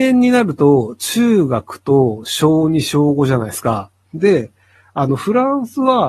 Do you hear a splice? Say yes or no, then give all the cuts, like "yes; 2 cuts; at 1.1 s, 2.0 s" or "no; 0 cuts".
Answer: no; 0 cuts